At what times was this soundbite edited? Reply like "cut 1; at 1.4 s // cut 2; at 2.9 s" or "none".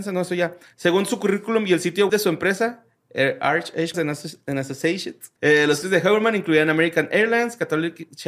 cut 1; at 2.1 s // cut 2; at 3.9 s // cut 3; at 5.4 s // cut 4; at 5.8 s